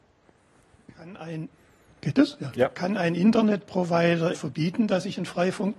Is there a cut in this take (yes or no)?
yes